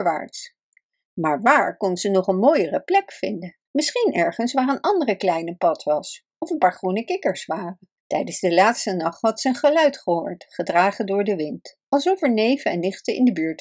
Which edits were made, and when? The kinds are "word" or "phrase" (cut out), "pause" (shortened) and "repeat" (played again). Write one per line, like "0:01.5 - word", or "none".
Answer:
0:03.7 - pause
0:08.0 - pause